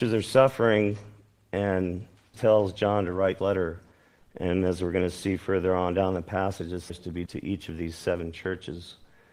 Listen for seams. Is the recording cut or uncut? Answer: cut